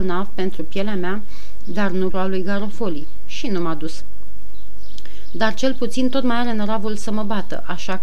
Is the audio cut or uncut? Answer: cut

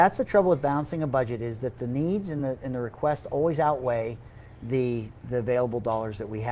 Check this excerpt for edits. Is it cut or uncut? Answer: uncut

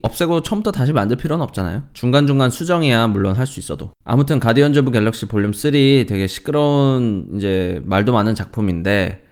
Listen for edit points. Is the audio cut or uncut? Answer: cut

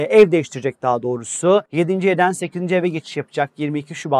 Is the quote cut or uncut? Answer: cut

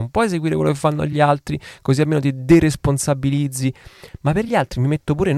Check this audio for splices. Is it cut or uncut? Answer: uncut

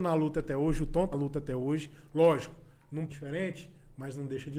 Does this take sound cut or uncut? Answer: cut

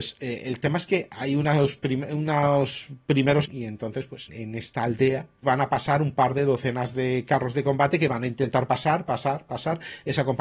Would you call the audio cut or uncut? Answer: cut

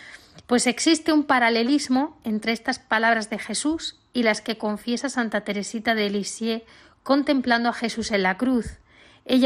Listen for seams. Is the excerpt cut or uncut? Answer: uncut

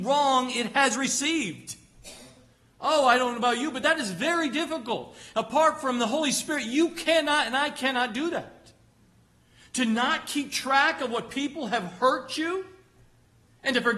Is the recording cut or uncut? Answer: uncut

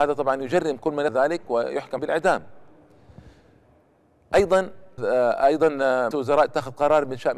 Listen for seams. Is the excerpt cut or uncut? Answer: cut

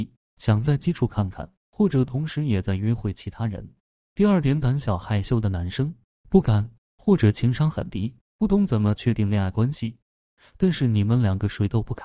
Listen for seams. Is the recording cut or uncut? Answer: uncut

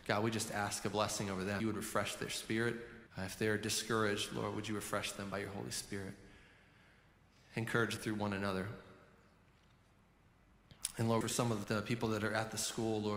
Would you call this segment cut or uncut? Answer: cut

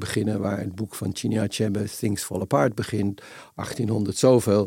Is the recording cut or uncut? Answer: uncut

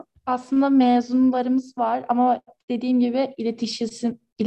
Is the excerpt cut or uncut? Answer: uncut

